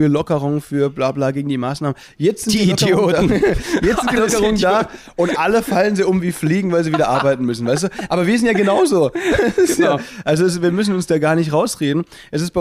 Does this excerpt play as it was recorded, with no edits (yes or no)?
yes